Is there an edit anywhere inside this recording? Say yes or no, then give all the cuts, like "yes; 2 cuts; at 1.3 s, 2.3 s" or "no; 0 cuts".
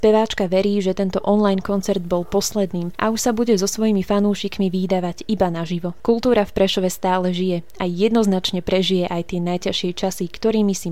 no; 0 cuts